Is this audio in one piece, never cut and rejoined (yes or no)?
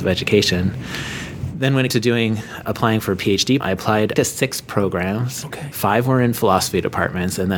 no